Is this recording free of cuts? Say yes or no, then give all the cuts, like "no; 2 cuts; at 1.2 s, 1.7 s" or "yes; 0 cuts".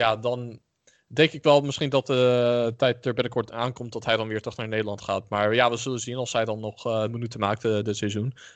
yes; 0 cuts